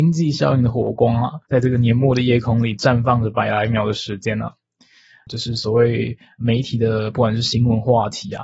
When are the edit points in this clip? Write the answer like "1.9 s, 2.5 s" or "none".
1.4 s

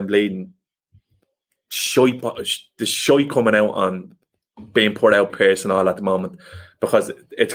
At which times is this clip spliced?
5.3 s

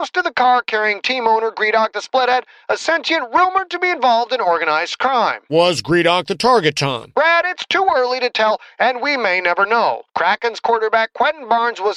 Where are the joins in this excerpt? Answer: 10.1 s

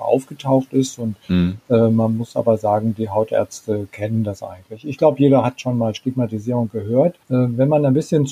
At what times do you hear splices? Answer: 7.2 s

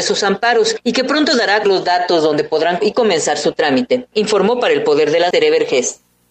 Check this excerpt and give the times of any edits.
1.6 s, 2.8 s, 5.3 s

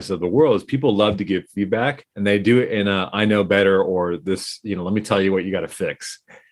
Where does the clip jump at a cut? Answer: 2.1 s

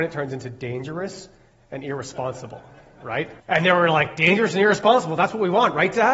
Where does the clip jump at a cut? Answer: 3.4 s

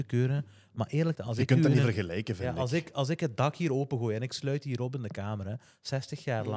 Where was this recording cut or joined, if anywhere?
1.1 s

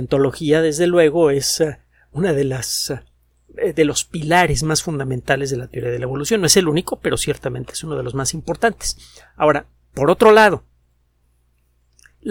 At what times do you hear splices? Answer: 9.8 s

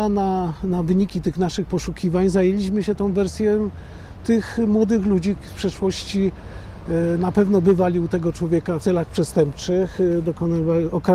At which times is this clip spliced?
5.4 s, 8.8 s

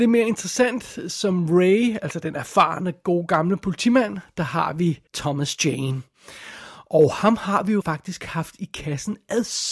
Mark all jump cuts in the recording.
5.1 s, 7.8 s

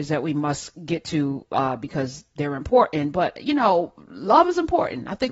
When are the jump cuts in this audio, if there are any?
none

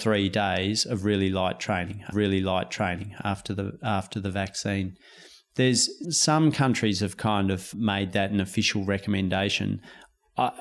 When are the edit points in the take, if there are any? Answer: 2.1 s, 6.0 s, 7.7 s

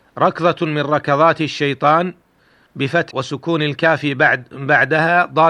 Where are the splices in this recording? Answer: 3.1 s

